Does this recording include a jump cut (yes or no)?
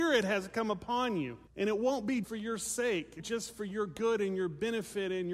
yes